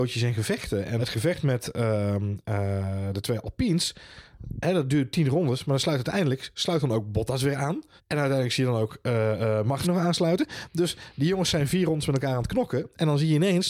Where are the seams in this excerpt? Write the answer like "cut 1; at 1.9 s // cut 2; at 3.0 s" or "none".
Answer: cut 1; at 1.0 s // cut 2; at 8.0 s // cut 3; at 9.8 s